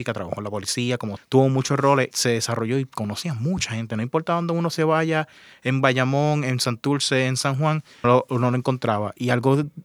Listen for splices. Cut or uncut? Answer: cut